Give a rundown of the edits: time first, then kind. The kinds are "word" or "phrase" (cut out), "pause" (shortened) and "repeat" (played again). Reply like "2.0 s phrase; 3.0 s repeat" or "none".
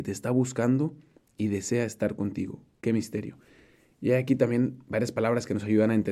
none